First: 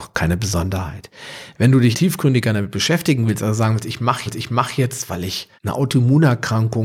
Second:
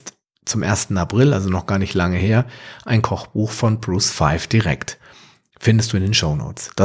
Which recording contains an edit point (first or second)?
first